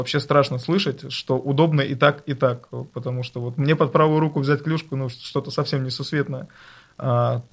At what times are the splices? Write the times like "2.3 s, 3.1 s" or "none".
none